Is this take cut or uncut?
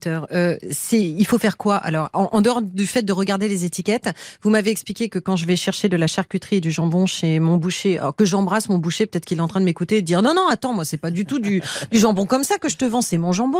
uncut